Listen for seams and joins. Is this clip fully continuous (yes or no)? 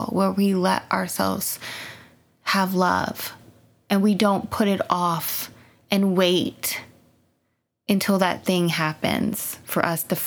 yes